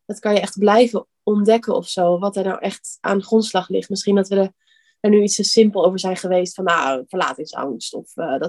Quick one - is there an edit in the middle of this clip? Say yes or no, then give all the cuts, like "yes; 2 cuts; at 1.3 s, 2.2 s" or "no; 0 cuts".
no; 0 cuts